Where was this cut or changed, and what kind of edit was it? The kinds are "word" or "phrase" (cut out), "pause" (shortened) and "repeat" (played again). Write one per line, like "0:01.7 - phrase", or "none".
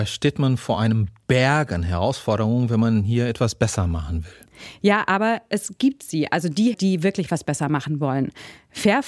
0:06.7 - word